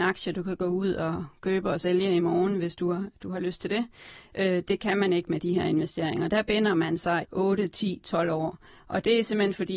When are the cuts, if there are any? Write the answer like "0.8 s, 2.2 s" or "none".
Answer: 7.2 s

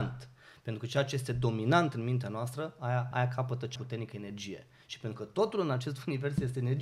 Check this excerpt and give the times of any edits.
3.1 s, 3.8 s

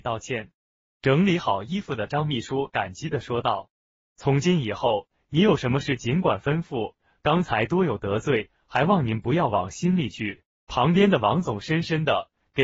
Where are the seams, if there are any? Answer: 10.6 s

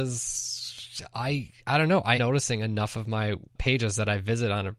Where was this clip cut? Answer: 2.2 s

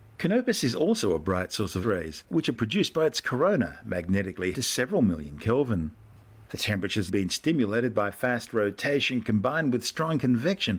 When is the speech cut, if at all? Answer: 1.8 s, 2.6 s, 4.5 s, 7.1 s

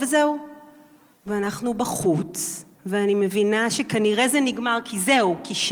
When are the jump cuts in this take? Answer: 2.7 s

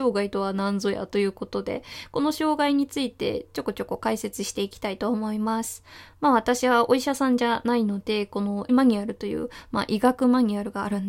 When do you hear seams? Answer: 8.7 s

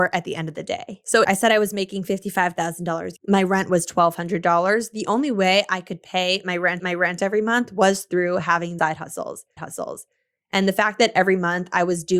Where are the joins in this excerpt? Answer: 1.2 s, 3.2 s, 6.8 s, 8.8 s, 9.6 s

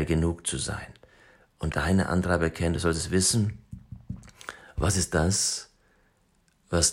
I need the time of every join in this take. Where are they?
1.7 s

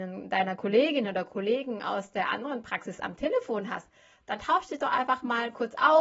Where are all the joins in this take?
none

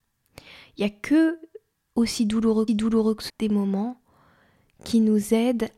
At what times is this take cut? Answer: 1.7 s, 2.7 s, 3.3 s

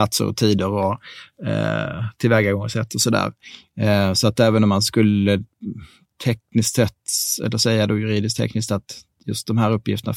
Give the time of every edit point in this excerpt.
none

